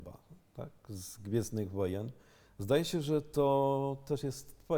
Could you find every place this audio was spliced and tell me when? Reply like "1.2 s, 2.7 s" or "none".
none